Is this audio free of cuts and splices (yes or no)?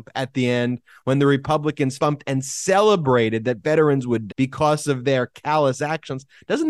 no